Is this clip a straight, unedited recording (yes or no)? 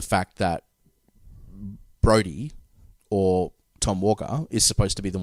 yes